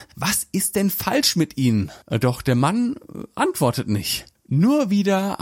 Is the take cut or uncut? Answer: cut